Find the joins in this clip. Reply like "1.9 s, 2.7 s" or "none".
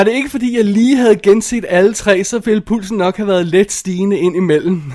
none